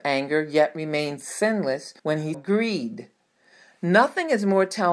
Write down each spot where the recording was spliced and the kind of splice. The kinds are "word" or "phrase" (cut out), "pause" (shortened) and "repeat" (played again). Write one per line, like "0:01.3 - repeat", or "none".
0:02.0 - pause
0:02.3 - word